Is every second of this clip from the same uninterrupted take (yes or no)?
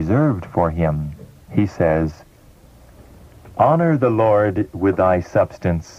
yes